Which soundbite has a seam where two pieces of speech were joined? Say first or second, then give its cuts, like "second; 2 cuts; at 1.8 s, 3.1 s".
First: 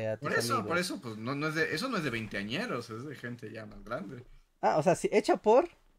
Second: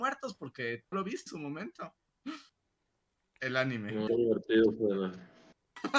second; 3 cuts; at 0.9 s, 1.3 s, 4.1 s